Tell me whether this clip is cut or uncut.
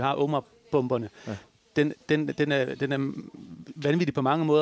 uncut